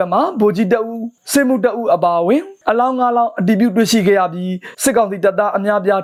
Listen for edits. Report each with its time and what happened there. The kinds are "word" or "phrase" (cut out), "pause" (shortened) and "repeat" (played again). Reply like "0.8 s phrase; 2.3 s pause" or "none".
4.7 s pause